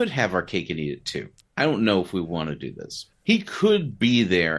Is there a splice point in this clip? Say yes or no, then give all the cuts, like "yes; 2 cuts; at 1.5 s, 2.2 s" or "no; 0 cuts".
yes; 2 cuts; at 1.4 s, 3.1 s